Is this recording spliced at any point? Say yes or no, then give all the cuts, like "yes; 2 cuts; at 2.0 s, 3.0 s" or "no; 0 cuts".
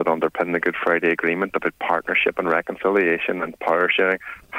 no; 0 cuts